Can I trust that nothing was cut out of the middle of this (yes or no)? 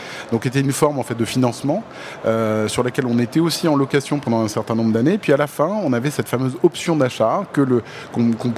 yes